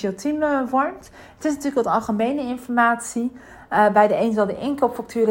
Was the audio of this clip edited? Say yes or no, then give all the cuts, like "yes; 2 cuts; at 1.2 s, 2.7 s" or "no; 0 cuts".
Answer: no; 0 cuts